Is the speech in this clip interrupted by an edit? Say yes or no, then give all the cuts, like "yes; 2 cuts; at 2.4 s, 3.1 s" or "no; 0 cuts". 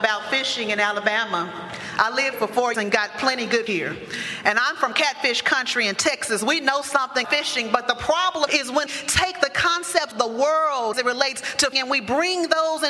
yes; 9 cuts; at 2.3 s, 2.7 s, 3.7 s, 7.2 s, 8.5 s, 8.9 s, 10.1 s, 10.9 s, 11.7 s